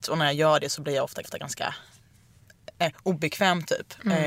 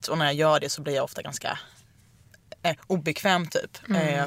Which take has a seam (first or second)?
first